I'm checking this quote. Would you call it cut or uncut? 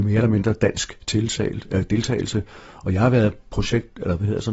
uncut